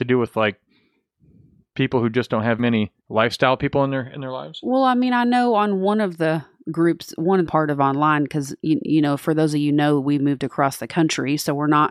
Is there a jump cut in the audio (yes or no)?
yes